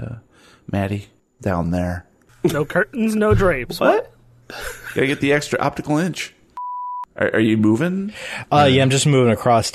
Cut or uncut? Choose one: uncut